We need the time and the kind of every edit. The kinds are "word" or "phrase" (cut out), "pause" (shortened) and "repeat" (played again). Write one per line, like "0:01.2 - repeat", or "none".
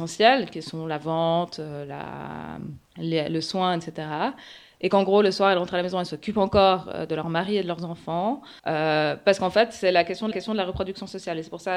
0:02.8 - pause
0:08.6 - pause
0:10.3 - repeat